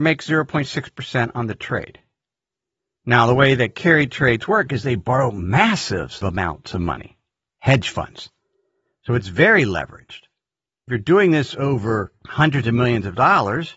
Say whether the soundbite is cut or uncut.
uncut